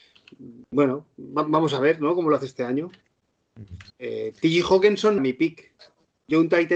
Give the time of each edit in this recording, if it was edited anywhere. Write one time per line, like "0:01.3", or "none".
0:03.9
0:05.2